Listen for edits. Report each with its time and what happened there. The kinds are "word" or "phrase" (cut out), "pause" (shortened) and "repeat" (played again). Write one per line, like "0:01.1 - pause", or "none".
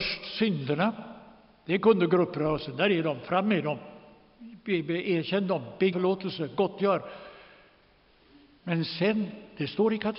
0:05.9 - phrase